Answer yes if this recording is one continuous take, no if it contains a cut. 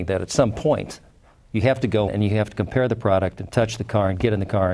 no